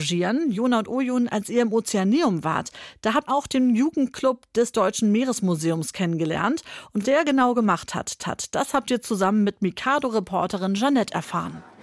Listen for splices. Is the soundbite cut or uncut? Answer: cut